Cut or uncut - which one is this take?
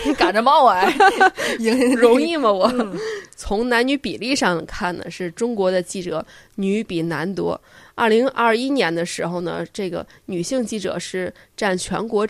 uncut